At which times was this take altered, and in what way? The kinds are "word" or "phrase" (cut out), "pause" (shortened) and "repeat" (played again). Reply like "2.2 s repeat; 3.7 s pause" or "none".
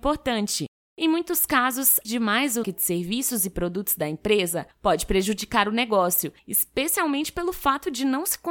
2.0 s word; 2.6 s word; 4.7 s pause; 6.4 s pause